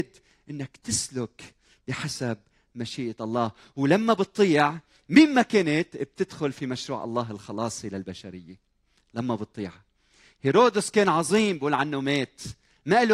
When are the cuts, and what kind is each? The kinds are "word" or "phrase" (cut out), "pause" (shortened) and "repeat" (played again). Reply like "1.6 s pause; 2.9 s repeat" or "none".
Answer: none